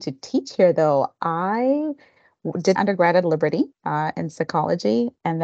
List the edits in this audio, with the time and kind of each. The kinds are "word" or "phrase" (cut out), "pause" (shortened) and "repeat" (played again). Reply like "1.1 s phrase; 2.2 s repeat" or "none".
2.8 s word; 3.7 s pause